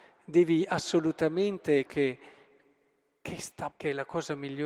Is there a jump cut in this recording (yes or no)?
yes